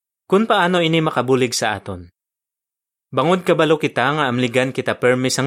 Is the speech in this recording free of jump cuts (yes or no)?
yes